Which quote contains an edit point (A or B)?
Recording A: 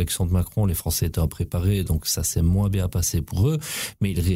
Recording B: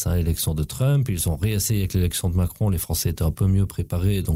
A